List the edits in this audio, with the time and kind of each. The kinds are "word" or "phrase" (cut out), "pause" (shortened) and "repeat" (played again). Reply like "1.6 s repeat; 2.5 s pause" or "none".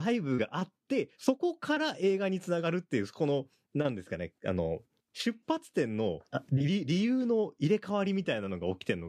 1.1 s pause; 6.3 s pause